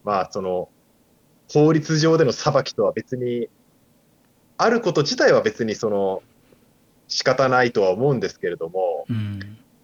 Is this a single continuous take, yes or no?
yes